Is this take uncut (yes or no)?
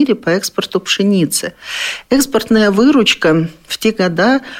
yes